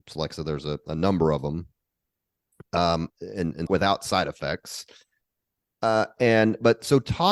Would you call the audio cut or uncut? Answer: cut